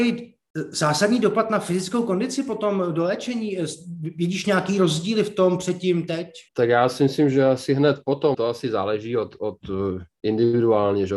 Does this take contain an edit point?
yes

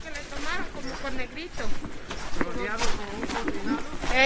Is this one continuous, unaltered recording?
no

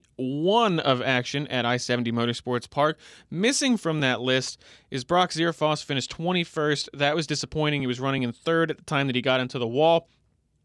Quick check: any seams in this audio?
no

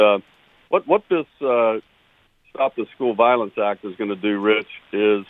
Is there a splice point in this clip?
no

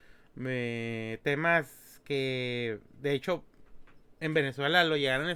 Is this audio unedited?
yes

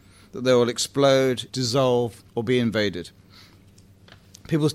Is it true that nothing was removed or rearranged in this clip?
no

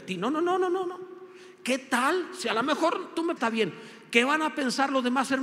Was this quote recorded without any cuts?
no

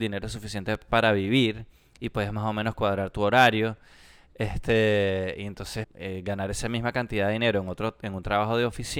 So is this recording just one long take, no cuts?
no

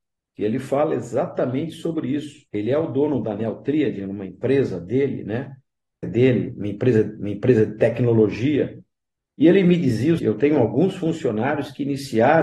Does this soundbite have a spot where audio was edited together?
yes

